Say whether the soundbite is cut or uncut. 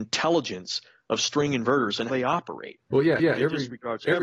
cut